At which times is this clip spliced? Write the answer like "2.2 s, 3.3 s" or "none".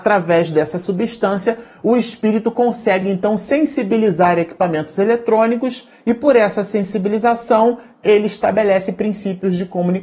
none